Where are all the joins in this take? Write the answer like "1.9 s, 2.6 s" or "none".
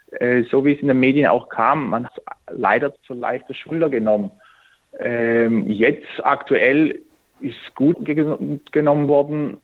2.1 s, 3.0 s, 7.9 s